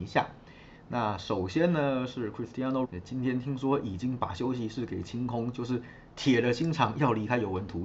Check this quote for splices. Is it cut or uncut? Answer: cut